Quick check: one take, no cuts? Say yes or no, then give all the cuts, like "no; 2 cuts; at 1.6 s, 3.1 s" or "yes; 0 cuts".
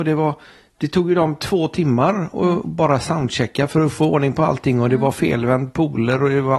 yes; 0 cuts